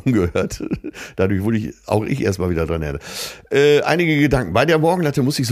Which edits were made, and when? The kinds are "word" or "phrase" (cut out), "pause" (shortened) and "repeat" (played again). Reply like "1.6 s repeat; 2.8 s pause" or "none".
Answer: none